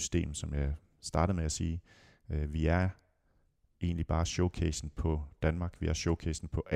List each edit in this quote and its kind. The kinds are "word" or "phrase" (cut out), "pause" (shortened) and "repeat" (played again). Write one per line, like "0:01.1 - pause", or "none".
none